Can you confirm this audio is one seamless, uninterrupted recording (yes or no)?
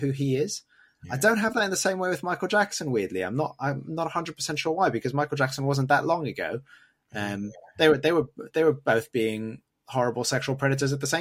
yes